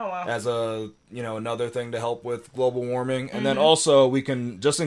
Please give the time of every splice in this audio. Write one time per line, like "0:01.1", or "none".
none